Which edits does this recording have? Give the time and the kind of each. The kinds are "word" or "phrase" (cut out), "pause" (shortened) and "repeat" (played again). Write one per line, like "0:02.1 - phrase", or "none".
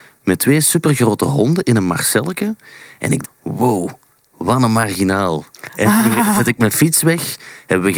0:03.2 - word